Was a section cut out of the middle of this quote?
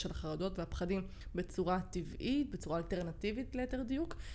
no; 0 cuts

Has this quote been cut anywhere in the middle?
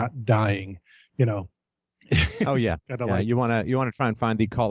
no; 0 cuts

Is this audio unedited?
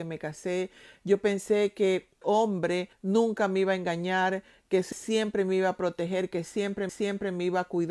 no; 4 cuts; at 2.2 s, 2.9 s, 4.9 s, 6.9 s

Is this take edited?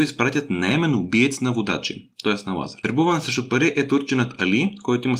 no; 0 cuts

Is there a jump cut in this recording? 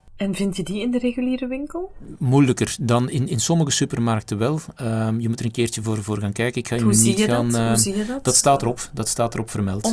no; 0 cuts

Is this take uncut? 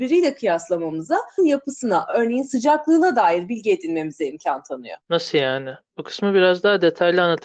no; 2 cuts; at 1.4 s, 5.0 s

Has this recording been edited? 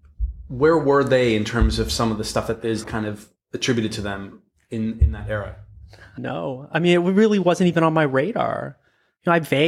yes; 2 cuts; at 2.8 s, 6.2 s

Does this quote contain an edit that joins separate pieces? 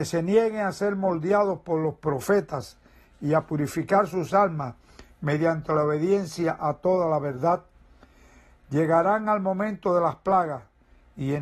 no; 0 cuts

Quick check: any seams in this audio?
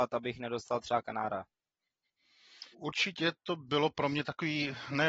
yes; 2 cuts; at 2.7 s, 3.7 s

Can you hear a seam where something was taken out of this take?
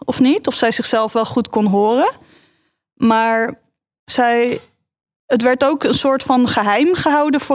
no; 0 cuts

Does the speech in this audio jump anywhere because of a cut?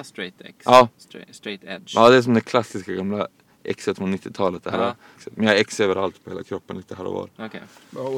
yes; 1 cut; at 5.2 s

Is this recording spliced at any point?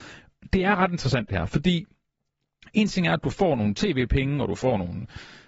no; 0 cuts

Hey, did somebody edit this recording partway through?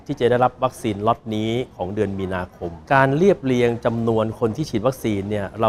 yes; 1 cut; at 2.8 s

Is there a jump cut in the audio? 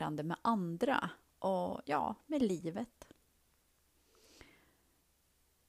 no; 0 cuts

